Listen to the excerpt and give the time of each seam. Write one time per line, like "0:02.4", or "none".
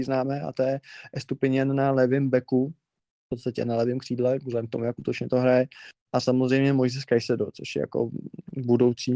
none